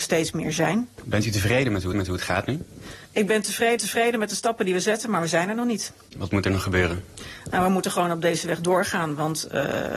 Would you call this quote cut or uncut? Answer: cut